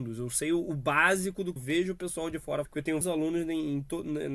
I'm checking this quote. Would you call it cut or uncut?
cut